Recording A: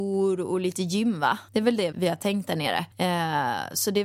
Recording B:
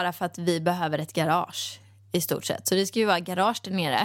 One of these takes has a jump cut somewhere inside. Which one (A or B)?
A